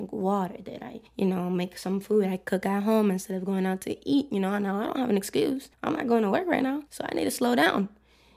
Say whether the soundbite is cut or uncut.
cut